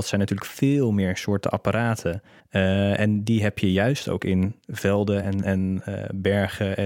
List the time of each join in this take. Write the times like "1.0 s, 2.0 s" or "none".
none